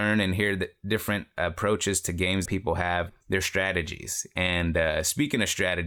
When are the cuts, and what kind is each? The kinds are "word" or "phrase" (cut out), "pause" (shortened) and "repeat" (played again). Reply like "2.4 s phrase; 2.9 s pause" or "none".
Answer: 2.5 s word